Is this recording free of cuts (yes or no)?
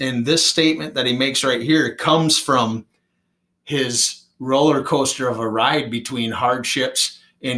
yes